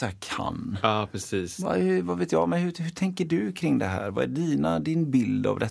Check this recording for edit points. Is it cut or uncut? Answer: uncut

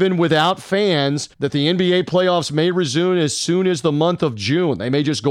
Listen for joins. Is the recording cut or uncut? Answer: cut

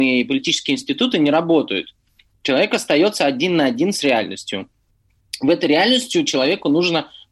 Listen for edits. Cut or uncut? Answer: uncut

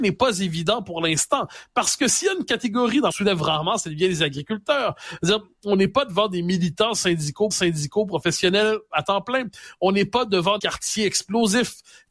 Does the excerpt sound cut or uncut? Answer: cut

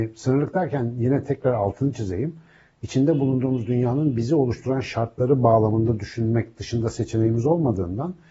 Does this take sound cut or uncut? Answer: uncut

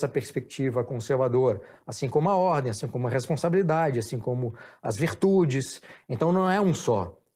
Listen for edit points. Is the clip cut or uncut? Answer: uncut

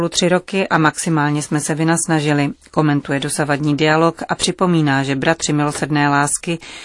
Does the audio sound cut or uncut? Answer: uncut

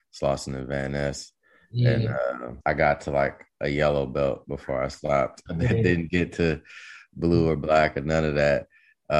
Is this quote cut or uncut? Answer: cut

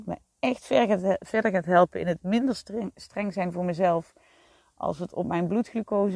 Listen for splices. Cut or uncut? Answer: uncut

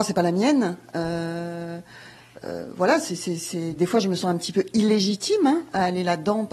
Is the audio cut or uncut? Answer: uncut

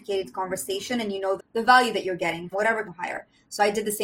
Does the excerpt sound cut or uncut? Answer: cut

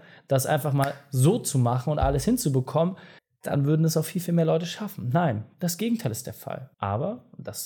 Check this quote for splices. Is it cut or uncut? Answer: cut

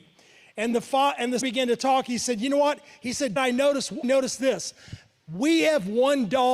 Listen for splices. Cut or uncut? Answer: cut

